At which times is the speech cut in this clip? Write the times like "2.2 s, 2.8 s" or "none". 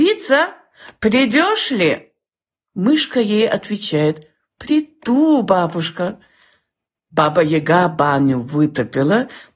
none